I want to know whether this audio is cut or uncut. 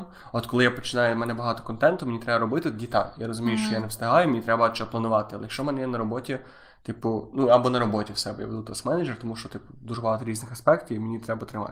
uncut